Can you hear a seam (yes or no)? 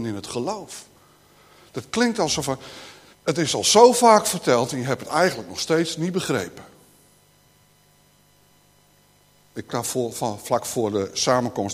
yes